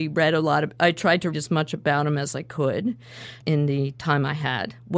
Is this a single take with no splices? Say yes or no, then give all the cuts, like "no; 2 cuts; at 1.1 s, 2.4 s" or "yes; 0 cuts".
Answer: no; 2 cuts; at 1.3 s, 3.4 s